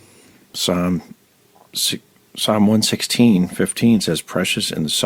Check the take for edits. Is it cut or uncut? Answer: uncut